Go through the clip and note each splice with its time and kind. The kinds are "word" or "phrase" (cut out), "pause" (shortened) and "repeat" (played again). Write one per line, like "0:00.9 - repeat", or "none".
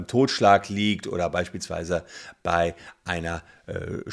none